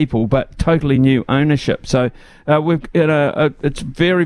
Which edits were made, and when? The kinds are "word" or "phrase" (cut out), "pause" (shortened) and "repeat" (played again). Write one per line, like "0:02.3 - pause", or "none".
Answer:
none